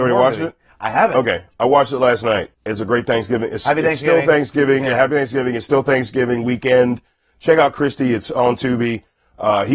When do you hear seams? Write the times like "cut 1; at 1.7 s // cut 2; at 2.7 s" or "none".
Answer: cut 1; at 2.5 s